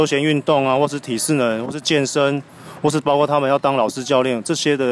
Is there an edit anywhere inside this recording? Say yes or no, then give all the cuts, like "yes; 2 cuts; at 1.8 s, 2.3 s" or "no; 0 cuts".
no; 0 cuts